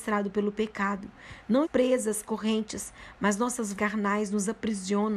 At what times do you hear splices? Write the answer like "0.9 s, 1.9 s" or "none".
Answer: 1.6 s, 2.2 s, 3.7 s